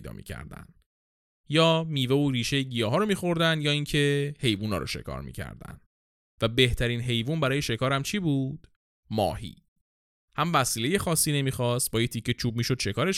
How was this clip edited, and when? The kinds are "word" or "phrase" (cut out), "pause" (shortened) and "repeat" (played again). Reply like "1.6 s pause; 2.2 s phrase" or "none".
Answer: none